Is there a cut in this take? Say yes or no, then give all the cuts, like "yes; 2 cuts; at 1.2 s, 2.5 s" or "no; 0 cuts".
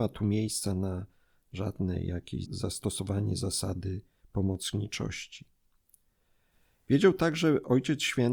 yes; 1 cut; at 2.4 s